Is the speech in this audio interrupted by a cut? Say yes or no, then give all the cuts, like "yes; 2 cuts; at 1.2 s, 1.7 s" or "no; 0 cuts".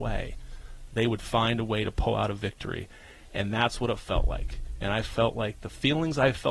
no; 0 cuts